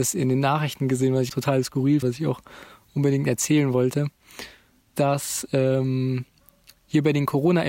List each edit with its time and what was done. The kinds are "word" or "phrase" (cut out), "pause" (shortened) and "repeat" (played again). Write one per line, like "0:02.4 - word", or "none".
0:01.3 - word
0:02.0 - word
0:04.9 - word